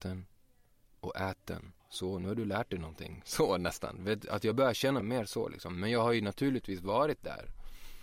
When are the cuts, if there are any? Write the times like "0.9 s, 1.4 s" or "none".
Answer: 1.8 s, 5.0 s